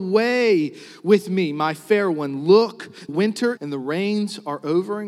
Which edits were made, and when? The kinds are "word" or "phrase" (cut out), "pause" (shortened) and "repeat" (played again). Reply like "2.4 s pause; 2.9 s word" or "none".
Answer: 3.1 s word; 3.6 s phrase